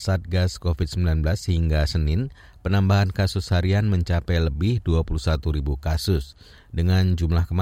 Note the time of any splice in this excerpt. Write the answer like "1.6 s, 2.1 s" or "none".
none